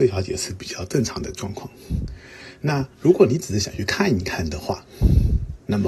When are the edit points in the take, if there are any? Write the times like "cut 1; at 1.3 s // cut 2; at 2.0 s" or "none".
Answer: cut 1; at 2.9 s